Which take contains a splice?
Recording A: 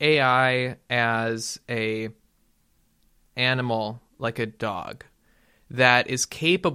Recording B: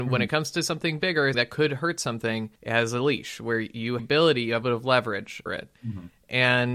B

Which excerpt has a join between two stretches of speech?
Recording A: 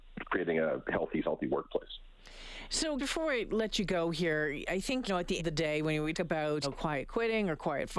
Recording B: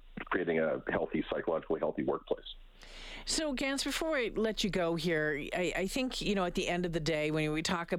A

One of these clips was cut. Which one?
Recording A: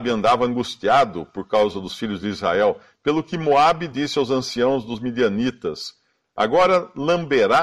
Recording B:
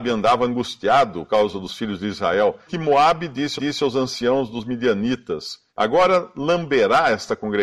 B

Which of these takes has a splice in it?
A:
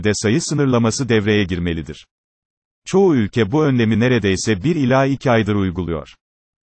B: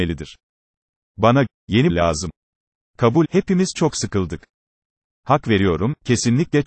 B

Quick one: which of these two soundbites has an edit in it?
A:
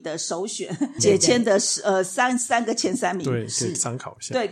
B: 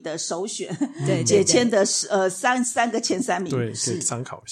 A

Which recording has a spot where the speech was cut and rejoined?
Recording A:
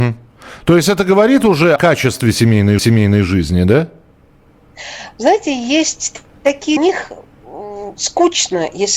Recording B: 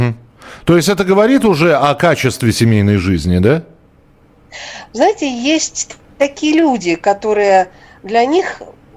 A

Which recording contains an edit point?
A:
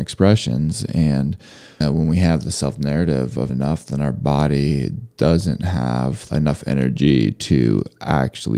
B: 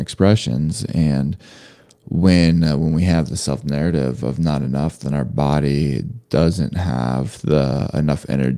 A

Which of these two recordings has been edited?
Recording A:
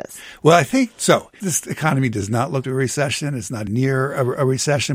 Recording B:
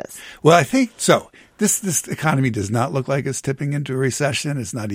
A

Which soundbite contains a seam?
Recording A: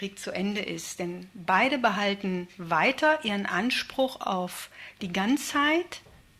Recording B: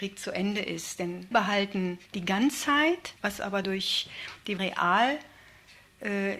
B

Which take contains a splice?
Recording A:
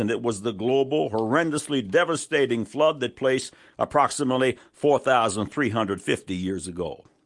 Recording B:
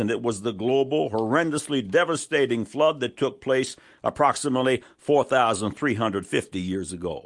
A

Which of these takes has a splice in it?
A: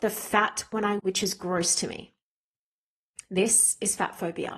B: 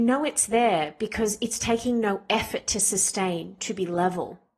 A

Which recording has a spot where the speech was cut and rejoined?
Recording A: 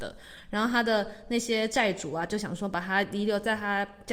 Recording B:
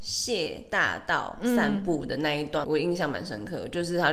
B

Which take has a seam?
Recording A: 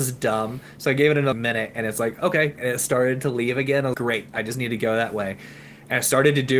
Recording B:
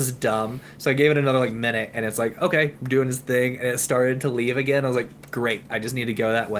A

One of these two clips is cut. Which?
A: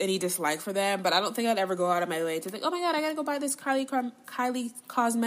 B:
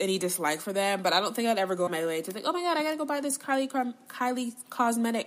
B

